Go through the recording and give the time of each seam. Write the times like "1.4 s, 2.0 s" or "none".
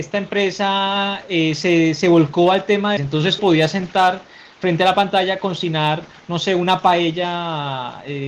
3.0 s, 3.4 s